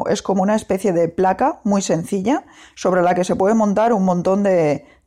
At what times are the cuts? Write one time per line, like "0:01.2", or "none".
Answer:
none